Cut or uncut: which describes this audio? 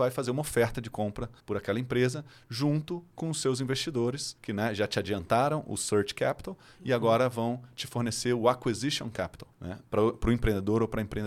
cut